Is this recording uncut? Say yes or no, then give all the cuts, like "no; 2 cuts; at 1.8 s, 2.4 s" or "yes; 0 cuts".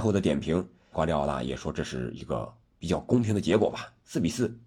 no; 1 cut; at 0.9 s